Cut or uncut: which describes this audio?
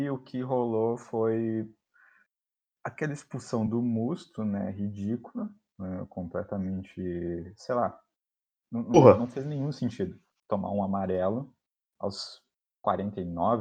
uncut